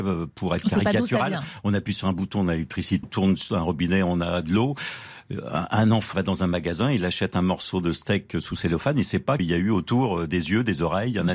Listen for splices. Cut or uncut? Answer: cut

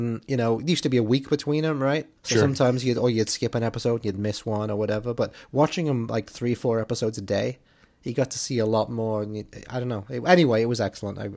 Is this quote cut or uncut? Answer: cut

